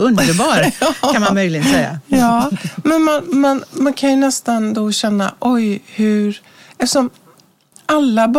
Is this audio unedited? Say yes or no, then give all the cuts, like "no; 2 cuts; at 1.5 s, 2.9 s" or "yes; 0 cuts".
yes; 0 cuts